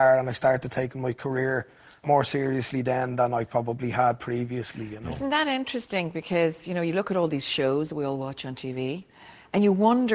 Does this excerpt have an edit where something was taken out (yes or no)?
yes